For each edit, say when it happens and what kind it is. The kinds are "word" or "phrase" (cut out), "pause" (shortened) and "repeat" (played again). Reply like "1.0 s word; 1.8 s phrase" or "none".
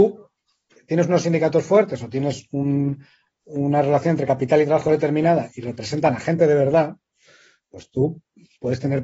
none

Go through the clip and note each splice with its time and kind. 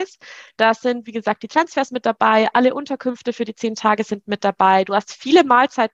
none

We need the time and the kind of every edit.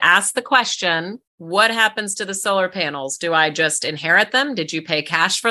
1.3 s pause

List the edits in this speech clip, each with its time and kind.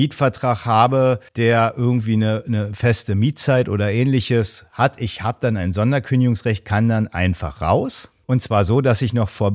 1.3 s pause

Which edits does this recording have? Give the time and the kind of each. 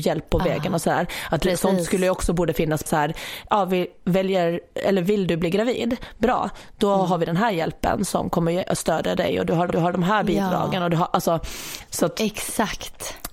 2.9 s word; 9.7 s repeat

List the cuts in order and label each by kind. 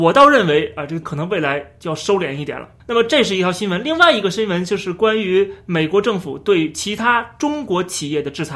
1.0 s word; 2.8 s pause

